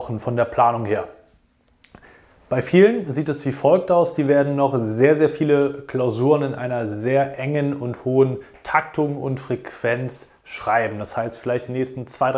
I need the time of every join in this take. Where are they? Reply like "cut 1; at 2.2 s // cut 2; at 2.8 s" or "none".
none